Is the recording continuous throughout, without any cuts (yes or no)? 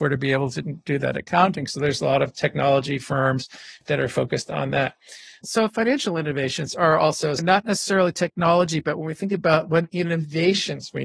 yes